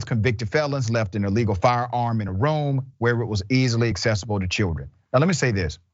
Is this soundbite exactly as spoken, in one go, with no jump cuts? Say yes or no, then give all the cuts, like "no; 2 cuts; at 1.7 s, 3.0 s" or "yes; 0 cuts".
yes; 0 cuts